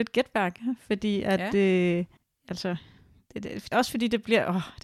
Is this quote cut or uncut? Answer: cut